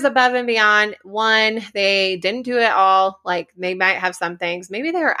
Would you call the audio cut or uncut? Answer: uncut